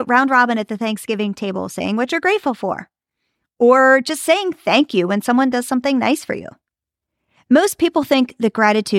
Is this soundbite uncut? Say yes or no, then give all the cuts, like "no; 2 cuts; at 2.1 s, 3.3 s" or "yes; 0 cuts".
yes; 0 cuts